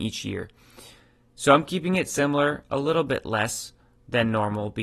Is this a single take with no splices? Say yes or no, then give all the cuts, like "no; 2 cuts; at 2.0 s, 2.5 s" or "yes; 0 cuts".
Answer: yes; 0 cuts